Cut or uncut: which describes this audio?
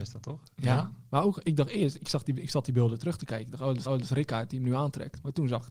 cut